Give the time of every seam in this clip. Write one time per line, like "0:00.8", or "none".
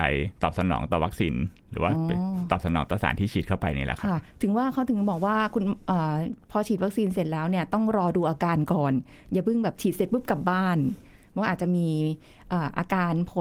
none